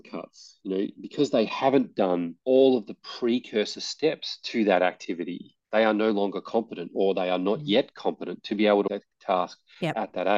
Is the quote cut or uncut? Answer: cut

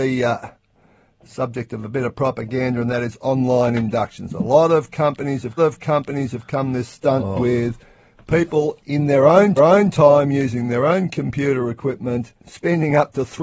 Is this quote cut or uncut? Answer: cut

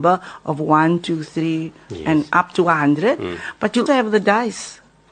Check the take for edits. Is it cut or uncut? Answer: cut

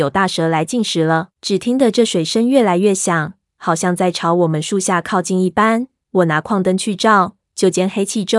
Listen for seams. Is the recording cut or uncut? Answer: cut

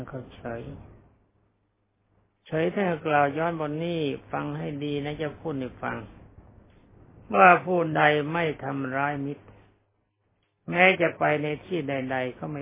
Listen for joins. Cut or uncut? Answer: uncut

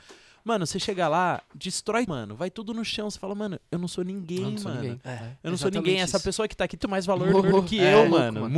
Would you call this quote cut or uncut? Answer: cut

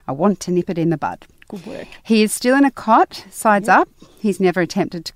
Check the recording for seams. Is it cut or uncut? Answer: uncut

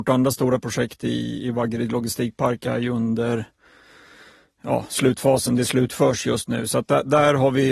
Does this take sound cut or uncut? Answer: uncut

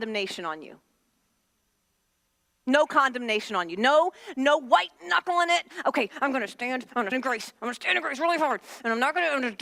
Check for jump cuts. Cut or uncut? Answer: cut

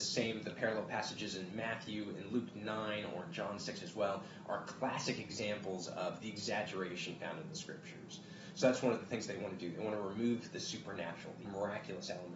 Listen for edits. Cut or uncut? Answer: cut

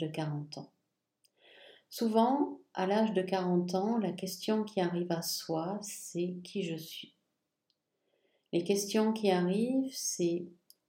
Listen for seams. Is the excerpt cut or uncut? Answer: uncut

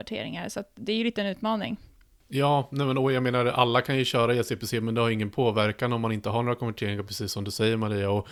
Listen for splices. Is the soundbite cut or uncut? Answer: uncut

